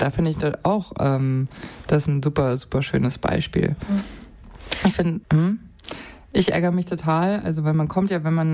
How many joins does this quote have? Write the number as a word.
one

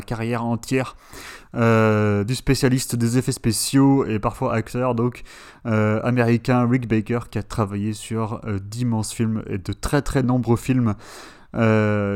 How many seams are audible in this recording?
zero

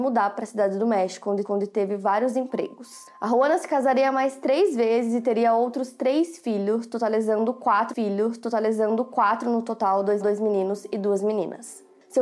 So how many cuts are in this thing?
three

